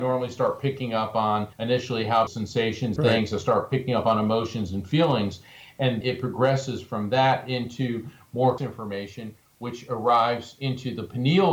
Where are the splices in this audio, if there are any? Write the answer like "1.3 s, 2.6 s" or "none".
1.5 s, 2.3 s, 3.0 s, 6.0 s, 8.6 s